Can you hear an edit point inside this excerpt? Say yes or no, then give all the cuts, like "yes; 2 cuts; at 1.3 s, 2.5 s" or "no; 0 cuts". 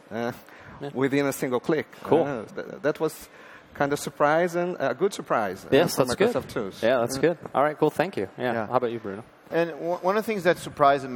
yes; 2 cuts; at 1.9 s, 2.5 s